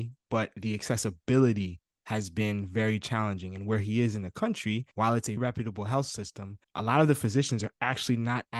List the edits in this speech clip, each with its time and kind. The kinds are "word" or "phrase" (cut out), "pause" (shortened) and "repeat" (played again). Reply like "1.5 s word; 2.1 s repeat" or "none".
4.9 s pause; 5.4 s word; 6.6 s pause